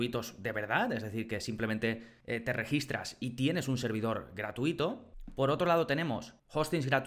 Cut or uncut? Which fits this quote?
uncut